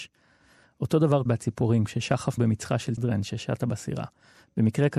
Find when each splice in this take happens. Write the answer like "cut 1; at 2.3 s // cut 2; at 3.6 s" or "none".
cut 1; at 1.3 s // cut 2; at 2.4 s // cut 3; at 3.0 s